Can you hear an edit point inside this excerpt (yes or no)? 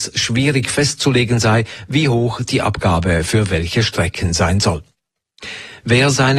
no